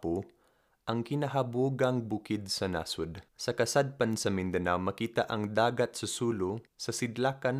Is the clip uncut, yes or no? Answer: no